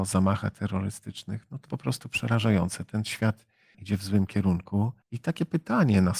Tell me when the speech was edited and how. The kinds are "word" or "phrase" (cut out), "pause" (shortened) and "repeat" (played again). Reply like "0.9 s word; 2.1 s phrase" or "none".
1.7 s word; 3.7 s word; 5.0 s pause